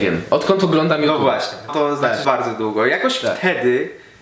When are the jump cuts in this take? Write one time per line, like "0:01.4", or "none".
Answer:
0:01.7
0:02.2